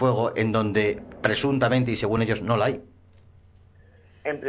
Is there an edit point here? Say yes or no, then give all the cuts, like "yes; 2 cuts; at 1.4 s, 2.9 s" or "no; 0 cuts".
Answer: no; 0 cuts